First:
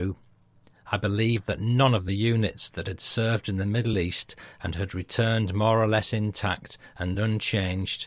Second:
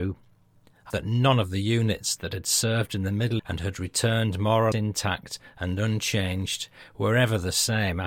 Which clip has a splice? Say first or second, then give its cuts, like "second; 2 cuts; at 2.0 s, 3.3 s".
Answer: second; 3 cuts; at 0.9 s, 3.4 s, 4.7 s